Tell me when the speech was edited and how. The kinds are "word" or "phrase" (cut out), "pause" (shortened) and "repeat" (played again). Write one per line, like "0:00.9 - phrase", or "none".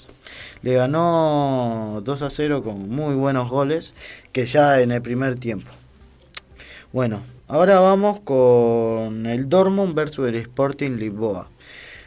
0:07.4 - pause